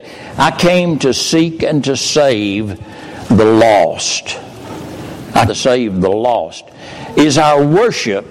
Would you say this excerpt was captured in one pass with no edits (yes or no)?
no